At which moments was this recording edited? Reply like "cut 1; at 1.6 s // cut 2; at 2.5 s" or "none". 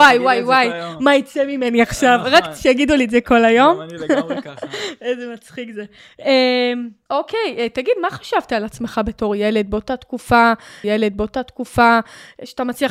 cut 1; at 7.1 s // cut 2; at 10.8 s